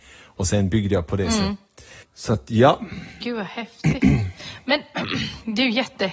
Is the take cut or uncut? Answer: cut